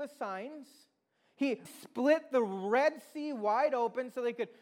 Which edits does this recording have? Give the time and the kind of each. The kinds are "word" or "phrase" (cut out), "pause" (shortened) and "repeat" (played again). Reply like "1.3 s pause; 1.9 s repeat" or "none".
1.7 s word